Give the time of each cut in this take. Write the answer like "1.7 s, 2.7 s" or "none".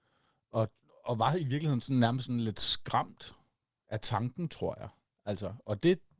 none